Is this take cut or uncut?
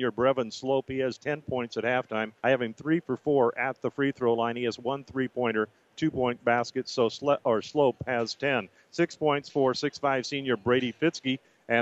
cut